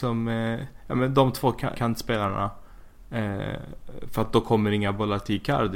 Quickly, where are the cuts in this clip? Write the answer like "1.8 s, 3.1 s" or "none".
1.7 s